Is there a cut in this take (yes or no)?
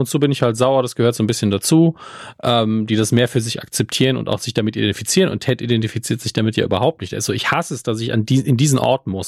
no